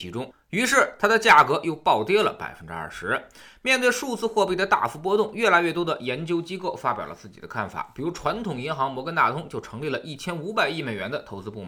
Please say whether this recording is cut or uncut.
uncut